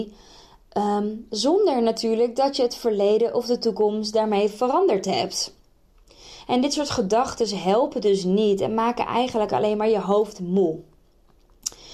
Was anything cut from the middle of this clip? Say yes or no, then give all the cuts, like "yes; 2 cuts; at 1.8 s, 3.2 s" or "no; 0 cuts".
no; 0 cuts